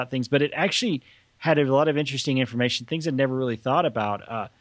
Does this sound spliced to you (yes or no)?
no